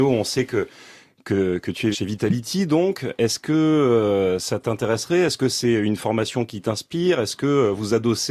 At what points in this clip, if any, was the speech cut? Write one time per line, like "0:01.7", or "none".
0:01.9